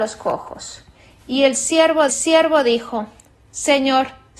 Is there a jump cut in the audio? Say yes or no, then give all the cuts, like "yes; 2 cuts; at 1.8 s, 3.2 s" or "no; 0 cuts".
yes; 1 cut; at 2.1 s